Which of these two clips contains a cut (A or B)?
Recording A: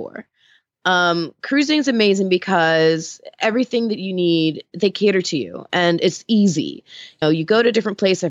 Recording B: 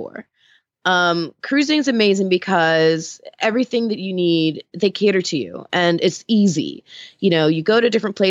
A